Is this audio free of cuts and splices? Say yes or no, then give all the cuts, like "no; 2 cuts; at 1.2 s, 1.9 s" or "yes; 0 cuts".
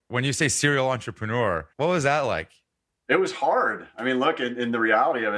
no; 1 cut; at 1.7 s